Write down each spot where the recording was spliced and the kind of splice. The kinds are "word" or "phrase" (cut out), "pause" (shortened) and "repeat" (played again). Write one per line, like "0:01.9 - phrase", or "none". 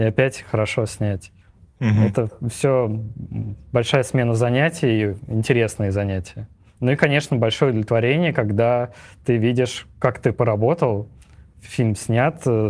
none